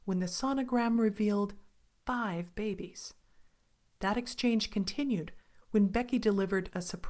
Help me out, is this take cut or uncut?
uncut